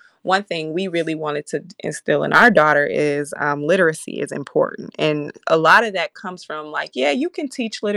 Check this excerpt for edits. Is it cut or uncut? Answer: uncut